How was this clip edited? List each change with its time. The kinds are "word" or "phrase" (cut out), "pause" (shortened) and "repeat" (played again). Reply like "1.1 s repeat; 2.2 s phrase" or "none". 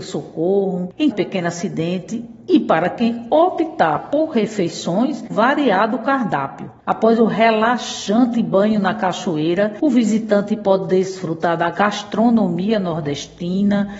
1.1 s phrase; 5.3 s phrase